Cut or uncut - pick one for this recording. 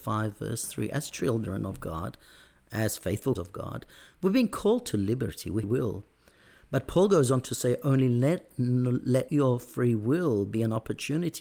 cut